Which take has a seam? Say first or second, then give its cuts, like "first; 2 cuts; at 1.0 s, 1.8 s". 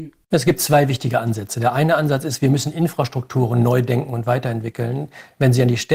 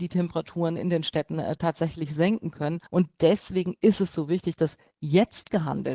second; 1 cut; at 2.9 s